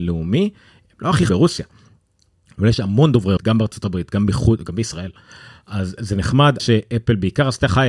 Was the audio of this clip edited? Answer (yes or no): yes